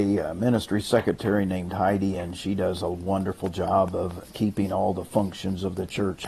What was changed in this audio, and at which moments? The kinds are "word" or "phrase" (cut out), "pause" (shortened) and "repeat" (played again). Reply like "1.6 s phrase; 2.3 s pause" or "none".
none